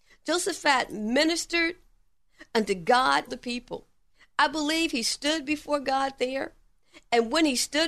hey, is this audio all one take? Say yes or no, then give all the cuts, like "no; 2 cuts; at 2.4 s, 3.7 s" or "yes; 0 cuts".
no; 2 cuts; at 3.3 s, 4.1 s